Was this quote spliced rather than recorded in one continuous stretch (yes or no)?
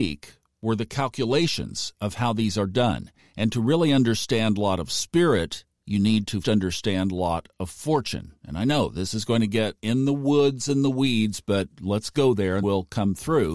yes